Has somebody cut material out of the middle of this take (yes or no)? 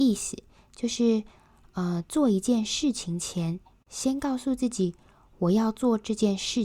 no